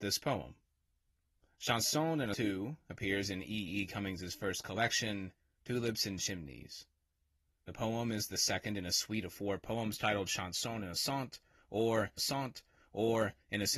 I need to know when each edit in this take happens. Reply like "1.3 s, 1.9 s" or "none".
2.3 s, 12.2 s